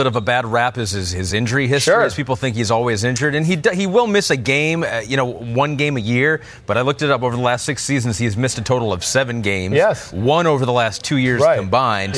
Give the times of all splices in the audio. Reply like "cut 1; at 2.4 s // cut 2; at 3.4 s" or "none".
none